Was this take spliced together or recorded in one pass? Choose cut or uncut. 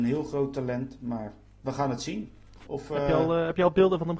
uncut